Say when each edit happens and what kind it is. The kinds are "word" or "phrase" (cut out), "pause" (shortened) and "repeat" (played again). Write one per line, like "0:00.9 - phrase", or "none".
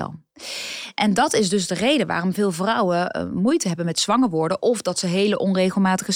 none